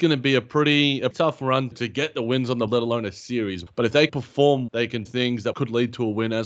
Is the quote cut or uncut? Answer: cut